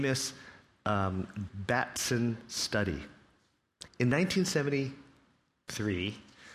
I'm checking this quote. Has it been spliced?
yes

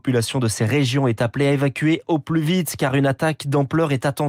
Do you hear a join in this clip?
no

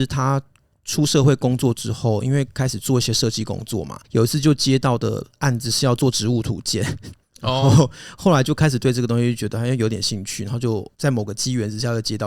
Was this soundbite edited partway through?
yes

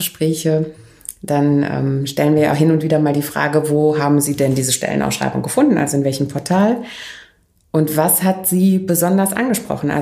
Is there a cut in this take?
no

